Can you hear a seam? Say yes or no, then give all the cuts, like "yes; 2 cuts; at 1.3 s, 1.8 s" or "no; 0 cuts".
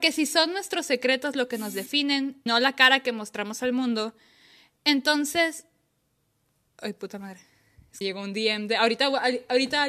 yes; 2 cuts; at 2.5 s, 8.0 s